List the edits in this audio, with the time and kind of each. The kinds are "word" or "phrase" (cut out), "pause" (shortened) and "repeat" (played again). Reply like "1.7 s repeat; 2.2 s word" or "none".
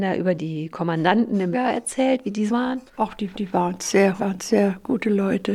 1.5 s word; 2.5 s word; 2.9 s pause; 3.3 s repeat; 4.2 s word